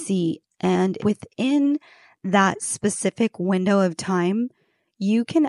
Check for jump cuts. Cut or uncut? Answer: cut